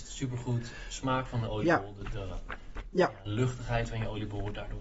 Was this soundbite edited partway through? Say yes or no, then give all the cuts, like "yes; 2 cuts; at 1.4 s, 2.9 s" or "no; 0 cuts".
no; 0 cuts